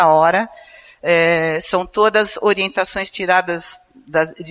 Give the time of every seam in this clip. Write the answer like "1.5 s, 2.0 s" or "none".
none